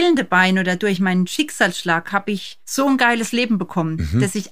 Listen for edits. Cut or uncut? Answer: uncut